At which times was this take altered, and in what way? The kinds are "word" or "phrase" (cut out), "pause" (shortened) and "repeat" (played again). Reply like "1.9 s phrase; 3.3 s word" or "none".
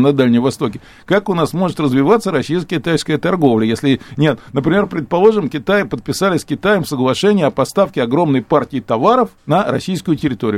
9.4 s pause